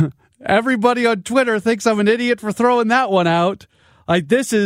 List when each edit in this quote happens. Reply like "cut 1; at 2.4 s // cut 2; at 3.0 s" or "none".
none

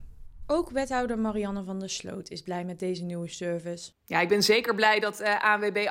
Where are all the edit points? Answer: cut 1; at 4.0 s

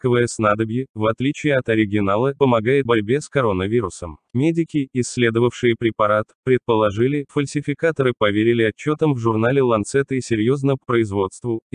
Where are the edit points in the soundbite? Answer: cut 1; at 2.4 s // cut 2; at 2.9 s // cut 3; at 4.3 s // cut 4; at 7.3 s // cut 5; at 10.8 s

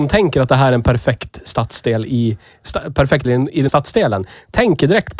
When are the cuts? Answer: cut 1; at 3.2 s // cut 2; at 3.7 s

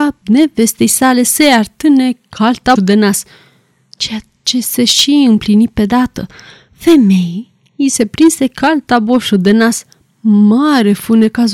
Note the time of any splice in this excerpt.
cut 1; at 2.8 s

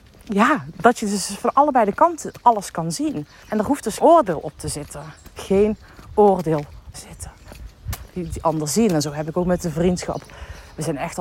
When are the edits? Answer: cut 1; at 3.4 s // cut 2; at 4.0 s // cut 3; at 6.9 s // cut 4; at 8.3 s

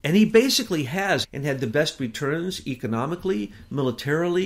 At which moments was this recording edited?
cut 1; at 1.2 s

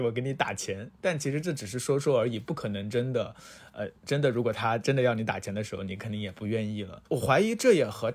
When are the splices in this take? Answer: cut 1; at 7.0 s

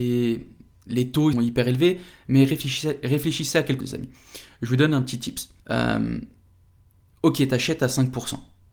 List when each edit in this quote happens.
cut 1; at 1.3 s // cut 2; at 3.8 s // cut 3; at 5.6 s

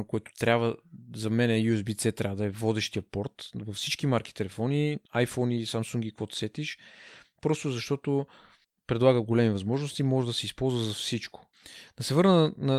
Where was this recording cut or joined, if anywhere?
cut 1; at 5.0 s // cut 2; at 8.6 s

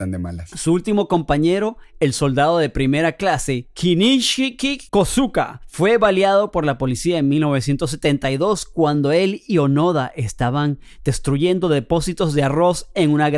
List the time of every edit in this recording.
cut 1; at 4.9 s

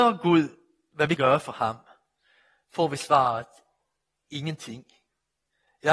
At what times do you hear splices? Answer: cut 1; at 1.2 s

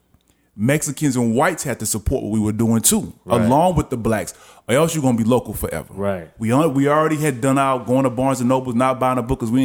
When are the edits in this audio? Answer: none

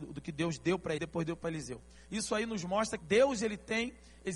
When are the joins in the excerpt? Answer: cut 1; at 1.0 s // cut 2; at 3.0 s

